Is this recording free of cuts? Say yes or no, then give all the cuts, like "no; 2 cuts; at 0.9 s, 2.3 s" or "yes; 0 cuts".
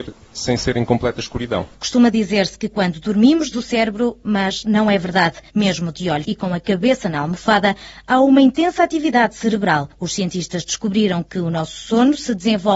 no; 4 cuts; at 3.5 s, 5.5 s, 6.2 s, 9.9 s